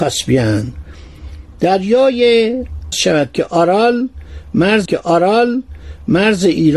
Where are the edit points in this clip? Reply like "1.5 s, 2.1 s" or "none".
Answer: 2.9 s, 4.8 s